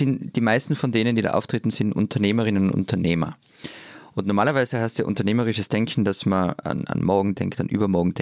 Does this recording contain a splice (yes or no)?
no